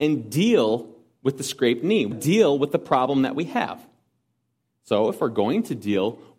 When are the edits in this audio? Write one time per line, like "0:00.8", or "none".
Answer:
0:02.1